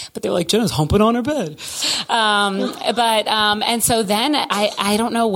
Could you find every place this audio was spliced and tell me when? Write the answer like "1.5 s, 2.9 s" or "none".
none